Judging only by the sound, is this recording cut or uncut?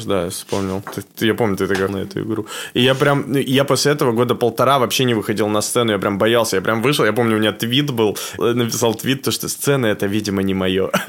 cut